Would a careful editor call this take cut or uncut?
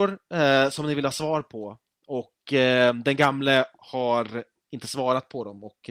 uncut